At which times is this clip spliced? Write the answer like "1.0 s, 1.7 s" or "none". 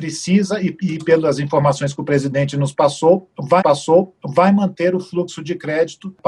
3.6 s